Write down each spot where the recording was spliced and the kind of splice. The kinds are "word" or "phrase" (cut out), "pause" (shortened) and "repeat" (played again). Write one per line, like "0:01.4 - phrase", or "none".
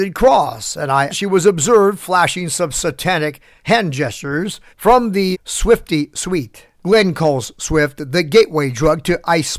0:01.1 - word
0:04.7 - pause
0:05.3 - word
0:06.7 - pause